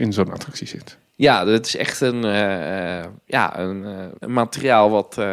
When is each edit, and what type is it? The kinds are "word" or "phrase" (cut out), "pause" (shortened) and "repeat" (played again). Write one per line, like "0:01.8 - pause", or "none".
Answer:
0:04.2 - pause